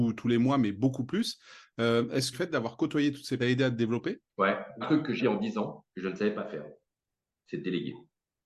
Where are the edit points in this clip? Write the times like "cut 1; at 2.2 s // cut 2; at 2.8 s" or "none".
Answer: cut 1; at 2.3 s // cut 2; at 3.4 s // cut 3; at 4.3 s // cut 4; at 4.8 s // cut 5; at 5.2 s // cut 6; at 5.9 s

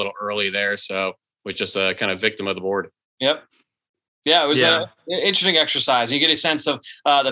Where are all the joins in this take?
none

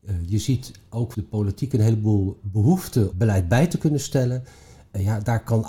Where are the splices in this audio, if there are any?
cut 1; at 1.1 s // cut 2; at 3.1 s

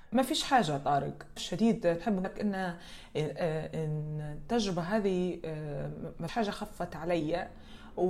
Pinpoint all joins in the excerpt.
cut 1; at 1.4 s // cut 2; at 2.2 s // cut 3; at 6.3 s

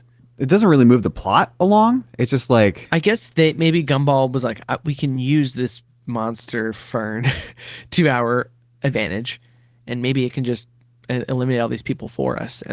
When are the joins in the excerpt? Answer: none

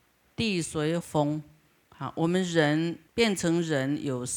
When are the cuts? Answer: cut 1; at 1.0 s // cut 2; at 3.1 s

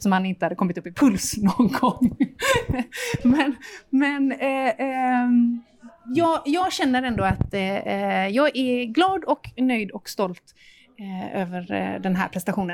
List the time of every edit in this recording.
none

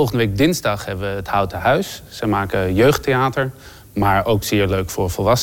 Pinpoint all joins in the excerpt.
none

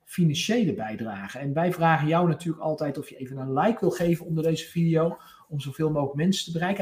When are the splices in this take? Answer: none

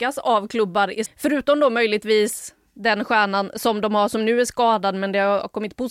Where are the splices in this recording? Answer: cut 1; at 1.1 s

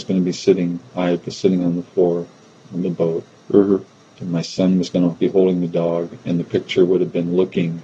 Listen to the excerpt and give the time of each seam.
none

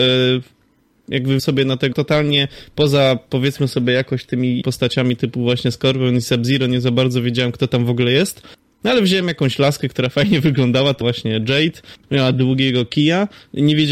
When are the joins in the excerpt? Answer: cut 1; at 1.4 s // cut 2; at 1.9 s // cut 3; at 4.6 s // cut 4; at 11.0 s

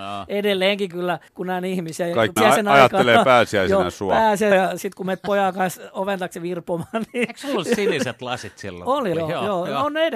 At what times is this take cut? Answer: cut 1; at 0.9 s // cut 2; at 1.3 s // cut 3; at 2.4 s // cut 4; at 4.5 s // cut 5; at 9.1 s

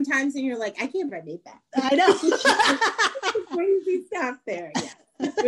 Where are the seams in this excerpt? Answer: cut 1; at 1.1 s

